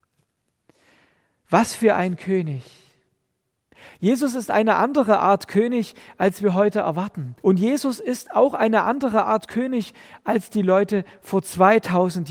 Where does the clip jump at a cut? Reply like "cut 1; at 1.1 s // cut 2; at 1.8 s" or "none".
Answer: cut 1; at 7.4 s